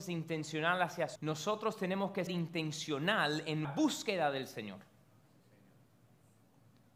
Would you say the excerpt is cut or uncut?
cut